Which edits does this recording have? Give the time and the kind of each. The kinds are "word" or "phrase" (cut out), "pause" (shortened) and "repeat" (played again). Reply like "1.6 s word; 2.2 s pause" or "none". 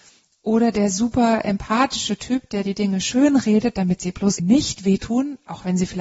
4.4 s word